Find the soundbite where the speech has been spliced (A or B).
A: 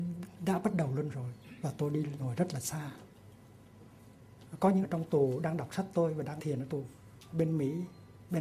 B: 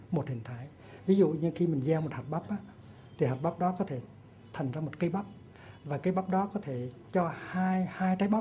A